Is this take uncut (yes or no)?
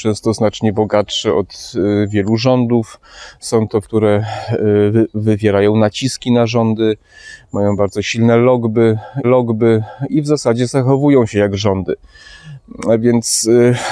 no